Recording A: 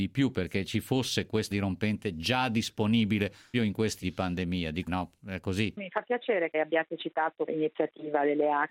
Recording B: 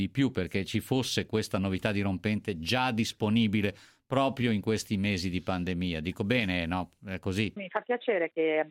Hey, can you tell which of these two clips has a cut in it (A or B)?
A